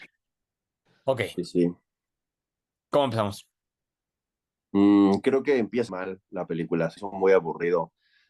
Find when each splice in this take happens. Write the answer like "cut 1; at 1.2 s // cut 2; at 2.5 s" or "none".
cut 1; at 5.9 s // cut 2; at 7.0 s

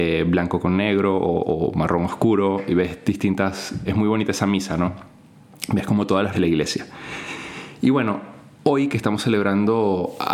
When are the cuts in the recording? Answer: cut 1; at 3.8 s // cut 2; at 6.3 s

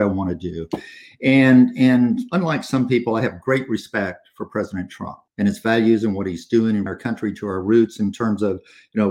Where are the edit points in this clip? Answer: cut 1; at 5.3 s // cut 2; at 6.9 s

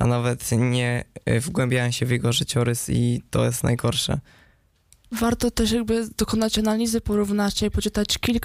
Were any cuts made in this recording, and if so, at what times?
none

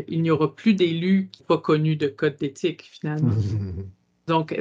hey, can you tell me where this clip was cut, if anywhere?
cut 1; at 1.4 s

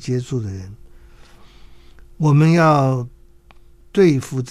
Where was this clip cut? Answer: none

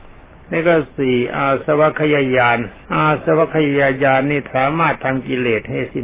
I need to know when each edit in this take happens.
cut 1; at 2.8 s

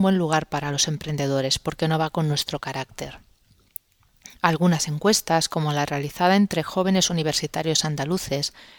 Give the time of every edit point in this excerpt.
none

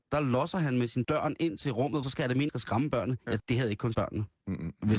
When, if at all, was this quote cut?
cut 1; at 1.0 s // cut 2; at 2.0 s // cut 3; at 2.5 s // cut 4; at 3.4 s // cut 5; at 3.9 s

